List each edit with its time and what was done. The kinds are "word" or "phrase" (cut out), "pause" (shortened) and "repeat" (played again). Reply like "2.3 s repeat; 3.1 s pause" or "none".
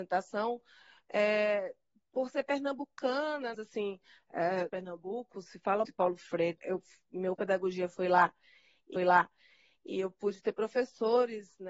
3.5 s phrase; 4.7 s phrase; 5.8 s word; 6.6 s word; 7.4 s word; 9.0 s repeat